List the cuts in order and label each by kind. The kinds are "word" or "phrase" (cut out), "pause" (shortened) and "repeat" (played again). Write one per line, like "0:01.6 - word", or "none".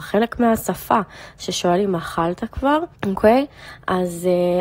0:03.0 - pause